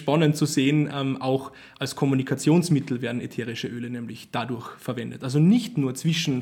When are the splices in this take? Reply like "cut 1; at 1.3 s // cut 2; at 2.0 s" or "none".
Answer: none